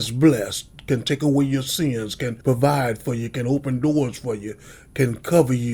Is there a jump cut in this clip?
yes; 1 cut; at 2.4 s

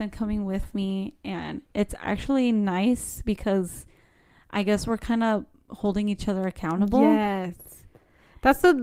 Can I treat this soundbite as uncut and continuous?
yes; 0 cuts

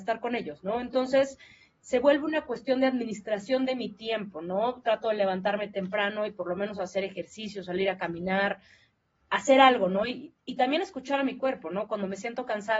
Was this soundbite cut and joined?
no; 0 cuts

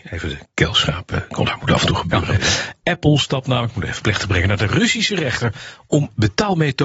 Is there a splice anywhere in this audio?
no; 0 cuts

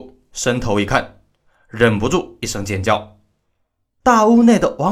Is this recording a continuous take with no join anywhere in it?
yes; 0 cuts

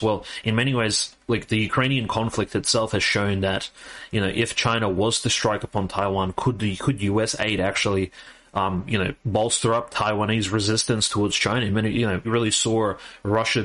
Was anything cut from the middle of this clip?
yes; 1 cut; at 12.2 s

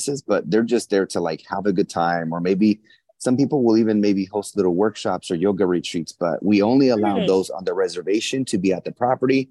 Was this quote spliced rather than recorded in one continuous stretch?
no; 0 cuts

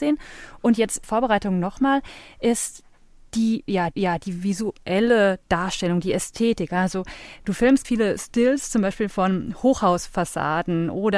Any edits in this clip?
yes; 3 cuts; at 1.0 s, 3.9 s, 7.8 s

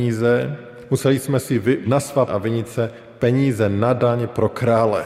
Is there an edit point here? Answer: yes; 2 cuts; at 1.8 s, 2.3 s

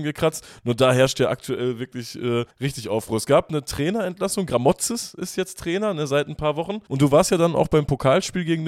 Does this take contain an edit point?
yes; 2 cuts; at 2.5 s, 6.9 s

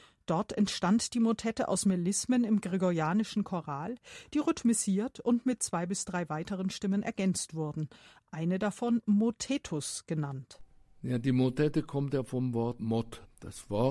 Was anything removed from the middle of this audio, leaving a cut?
no; 0 cuts

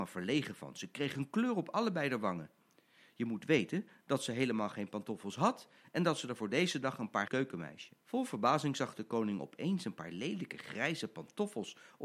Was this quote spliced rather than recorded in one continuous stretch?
yes; 2 cuts; at 7.3 s, 8.0 s

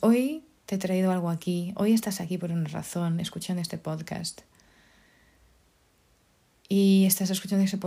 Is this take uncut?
yes; 0 cuts

